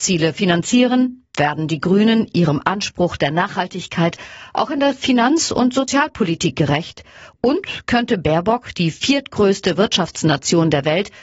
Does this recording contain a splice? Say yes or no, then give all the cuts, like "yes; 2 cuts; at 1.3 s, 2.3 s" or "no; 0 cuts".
no; 0 cuts